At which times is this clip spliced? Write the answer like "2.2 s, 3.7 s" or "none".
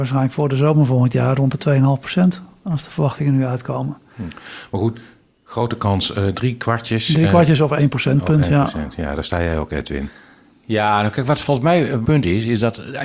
12.0 s